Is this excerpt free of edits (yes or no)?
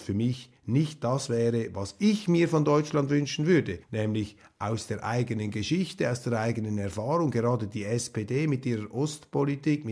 no